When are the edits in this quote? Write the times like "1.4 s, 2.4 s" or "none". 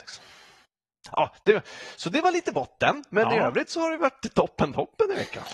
none